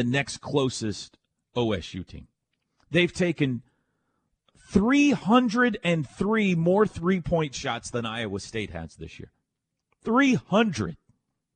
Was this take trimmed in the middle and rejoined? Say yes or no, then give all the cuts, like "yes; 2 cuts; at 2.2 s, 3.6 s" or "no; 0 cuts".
yes; 1 cut; at 4.5 s